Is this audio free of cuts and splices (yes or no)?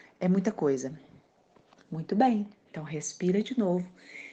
yes